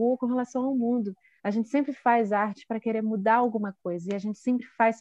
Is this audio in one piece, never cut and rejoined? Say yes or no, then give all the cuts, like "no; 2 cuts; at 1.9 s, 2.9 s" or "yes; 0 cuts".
yes; 0 cuts